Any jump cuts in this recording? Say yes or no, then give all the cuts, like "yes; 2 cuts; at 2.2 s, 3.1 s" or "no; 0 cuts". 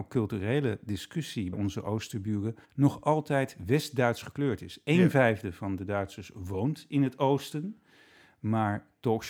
yes; 2 cuts; at 1.5 s, 2.6 s